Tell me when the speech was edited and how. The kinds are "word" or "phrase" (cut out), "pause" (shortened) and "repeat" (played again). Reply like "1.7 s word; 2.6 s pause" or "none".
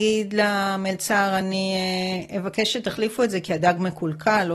none